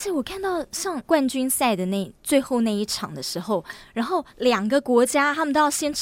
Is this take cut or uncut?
cut